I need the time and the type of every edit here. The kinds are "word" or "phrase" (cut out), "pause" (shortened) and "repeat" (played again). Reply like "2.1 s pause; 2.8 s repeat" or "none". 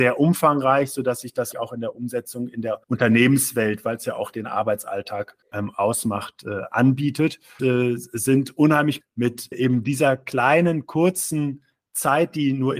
1.5 s word; 2.8 s pause; 5.4 s pause; 7.6 s word; 9.0 s phrase; 9.5 s word